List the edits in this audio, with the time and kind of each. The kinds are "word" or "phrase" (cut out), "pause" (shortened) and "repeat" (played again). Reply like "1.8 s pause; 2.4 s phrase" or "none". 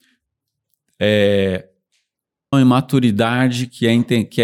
2.5 s word